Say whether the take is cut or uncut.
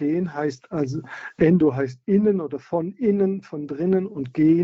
uncut